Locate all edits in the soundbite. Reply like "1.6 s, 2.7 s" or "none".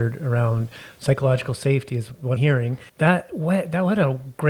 2.4 s, 2.9 s